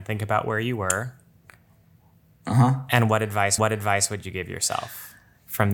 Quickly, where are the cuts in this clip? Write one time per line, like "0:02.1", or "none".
0:03.6